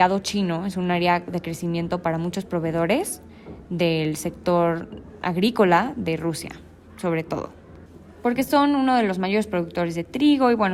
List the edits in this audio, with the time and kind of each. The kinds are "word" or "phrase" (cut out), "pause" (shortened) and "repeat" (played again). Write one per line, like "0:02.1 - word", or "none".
none